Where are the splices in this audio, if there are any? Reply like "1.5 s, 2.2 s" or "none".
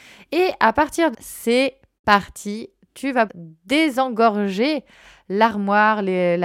1.1 s, 3.3 s